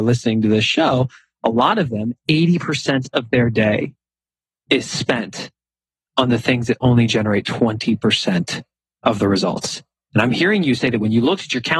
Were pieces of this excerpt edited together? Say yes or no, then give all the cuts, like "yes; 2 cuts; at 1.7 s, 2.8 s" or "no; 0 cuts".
no; 0 cuts